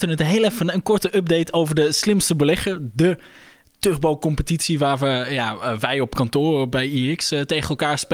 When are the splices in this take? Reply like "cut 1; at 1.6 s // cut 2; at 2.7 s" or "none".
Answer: none

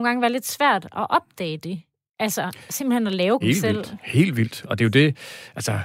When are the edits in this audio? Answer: cut 1; at 3.4 s

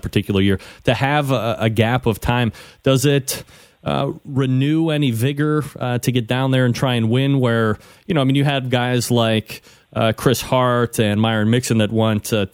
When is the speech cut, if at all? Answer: none

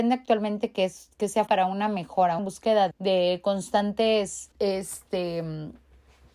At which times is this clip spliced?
cut 1; at 1.5 s // cut 2; at 2.4 s // cut 3; at 2.9 s // cut 4; at 4.5 s

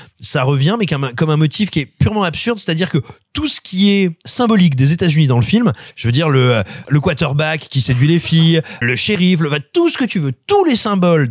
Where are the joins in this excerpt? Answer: cut 1; at 6.8 s // cut 2; at 8.8 s

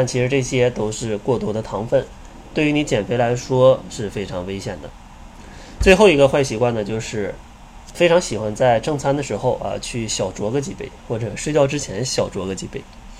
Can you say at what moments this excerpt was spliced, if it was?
cut 1; at 7.9 s

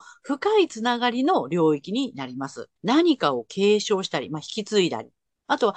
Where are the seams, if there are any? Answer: cut 1; at 2.8 s

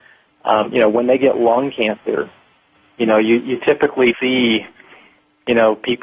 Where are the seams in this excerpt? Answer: cut 1; at 4.1 s

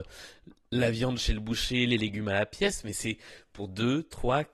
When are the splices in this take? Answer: none

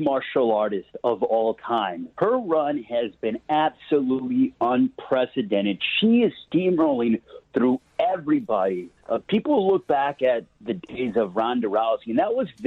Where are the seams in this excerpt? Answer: cut 1; at 2.1 s // cut 2; at 9.0 s

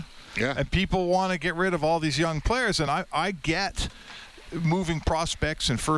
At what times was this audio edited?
none

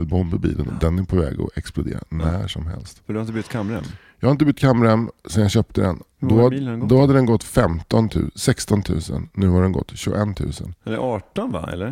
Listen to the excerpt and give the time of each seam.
cut 1; at 6.1 s

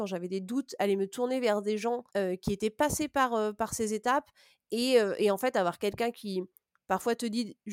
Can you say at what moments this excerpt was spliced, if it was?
cut 1; at 2.1 s

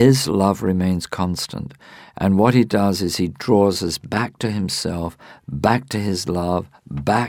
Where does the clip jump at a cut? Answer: none

